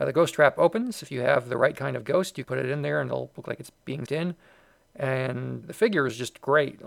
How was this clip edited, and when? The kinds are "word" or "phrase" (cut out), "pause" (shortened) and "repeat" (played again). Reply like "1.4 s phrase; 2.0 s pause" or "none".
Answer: 2.4 s word; 4.1 s word; 5.6 s word